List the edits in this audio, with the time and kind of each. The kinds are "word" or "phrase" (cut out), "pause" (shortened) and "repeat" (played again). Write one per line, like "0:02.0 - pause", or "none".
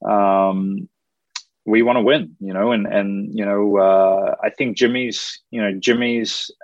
none